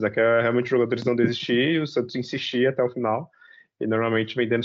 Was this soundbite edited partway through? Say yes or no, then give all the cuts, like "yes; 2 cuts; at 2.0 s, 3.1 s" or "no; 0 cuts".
no; 0 cuts